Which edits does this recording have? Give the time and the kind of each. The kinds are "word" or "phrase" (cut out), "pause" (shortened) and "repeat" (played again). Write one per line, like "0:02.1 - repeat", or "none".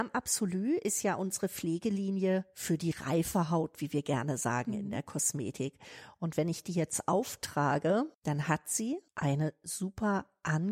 0:08.1 - pause
0:09.1 - pause